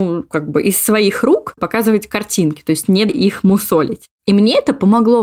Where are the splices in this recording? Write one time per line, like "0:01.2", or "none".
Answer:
0:01.6
0:03.1